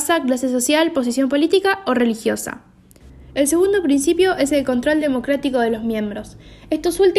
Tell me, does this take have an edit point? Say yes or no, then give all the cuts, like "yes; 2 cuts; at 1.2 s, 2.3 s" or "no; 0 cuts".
no; 0 cuts